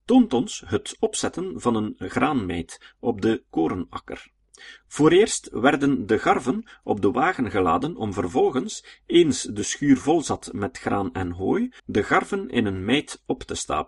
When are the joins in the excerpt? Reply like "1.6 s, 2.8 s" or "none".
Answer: 11.8 s